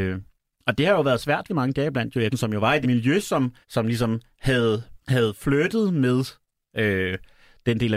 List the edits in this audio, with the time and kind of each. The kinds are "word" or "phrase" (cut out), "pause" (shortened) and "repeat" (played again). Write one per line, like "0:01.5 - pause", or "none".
0:01.5 - phrase
0:02.3 - word
0:02.8 - word
0:03.6 - pause
0:05.0 - pause